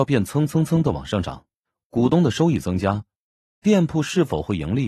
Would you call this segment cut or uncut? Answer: cut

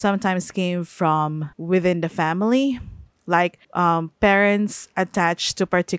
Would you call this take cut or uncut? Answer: cut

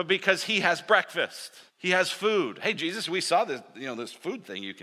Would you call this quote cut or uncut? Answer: cut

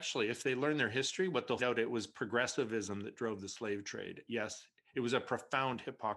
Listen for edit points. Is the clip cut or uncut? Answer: cut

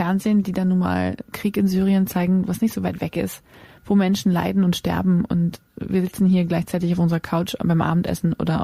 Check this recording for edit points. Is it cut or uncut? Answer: cut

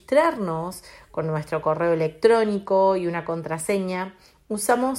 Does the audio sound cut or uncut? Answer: uncut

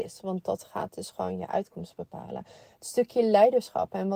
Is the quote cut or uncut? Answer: uncut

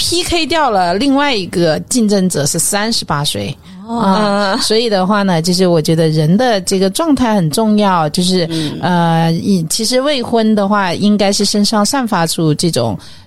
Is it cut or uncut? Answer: uncut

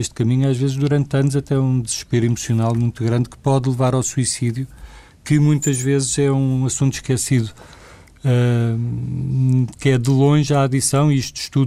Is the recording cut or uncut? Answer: uncut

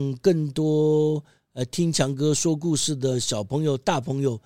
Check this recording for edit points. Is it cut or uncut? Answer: uncut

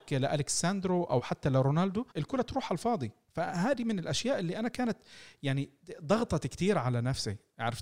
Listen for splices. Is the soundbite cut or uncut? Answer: cut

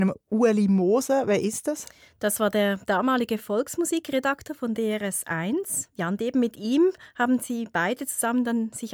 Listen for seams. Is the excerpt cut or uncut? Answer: uncut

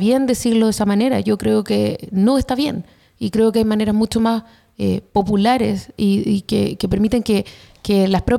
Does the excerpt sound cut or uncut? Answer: uncut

